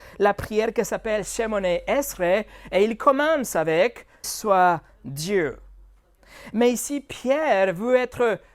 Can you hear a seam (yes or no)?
yes